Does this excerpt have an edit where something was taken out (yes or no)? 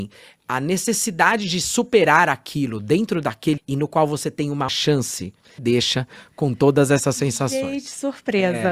yes